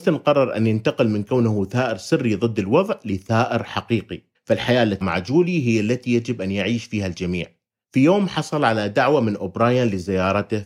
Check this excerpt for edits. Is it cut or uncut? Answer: cut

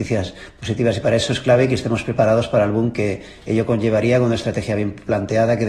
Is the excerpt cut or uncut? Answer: uncut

